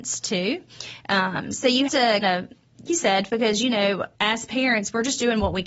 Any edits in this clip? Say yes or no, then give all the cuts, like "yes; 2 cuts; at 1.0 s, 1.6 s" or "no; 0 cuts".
yes; 5 cuts; at 1.9 s, 2.2 s, 2.9 s, 3.3 s, 4.1 s